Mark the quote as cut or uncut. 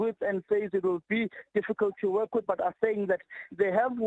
cut